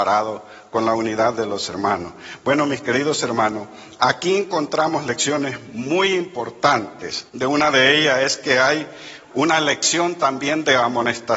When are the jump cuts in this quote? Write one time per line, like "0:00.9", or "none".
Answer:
0:07.3